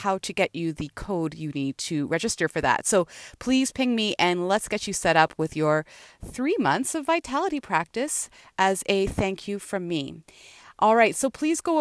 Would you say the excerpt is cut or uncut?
uncut